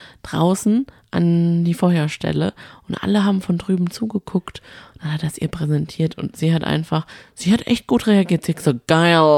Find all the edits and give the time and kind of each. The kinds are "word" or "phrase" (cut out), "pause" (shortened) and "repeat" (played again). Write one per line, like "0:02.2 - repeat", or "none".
none